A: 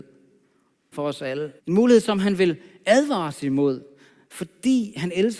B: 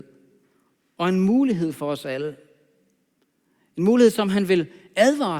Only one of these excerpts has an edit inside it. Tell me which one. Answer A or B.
A